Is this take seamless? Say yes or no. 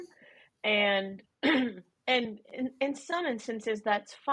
yes